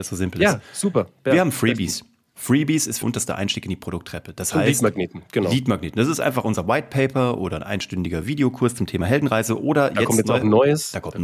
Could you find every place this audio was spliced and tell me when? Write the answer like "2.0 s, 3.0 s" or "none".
3.0 s